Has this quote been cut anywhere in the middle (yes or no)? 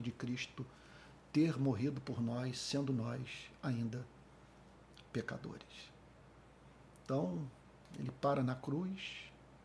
no